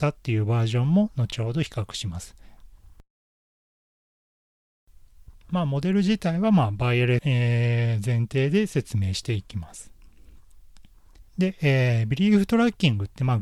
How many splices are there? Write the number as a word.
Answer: two